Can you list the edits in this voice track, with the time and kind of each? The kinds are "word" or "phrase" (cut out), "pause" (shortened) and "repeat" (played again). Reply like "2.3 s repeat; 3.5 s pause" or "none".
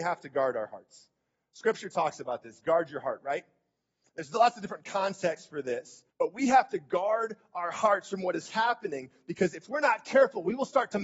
6.1 s pause